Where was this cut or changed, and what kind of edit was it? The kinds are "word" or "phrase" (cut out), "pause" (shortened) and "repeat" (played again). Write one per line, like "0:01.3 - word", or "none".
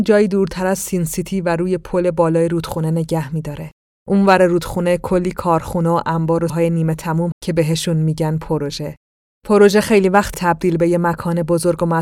0:06.5 - word
0:07.3 - word
0:10.3 - word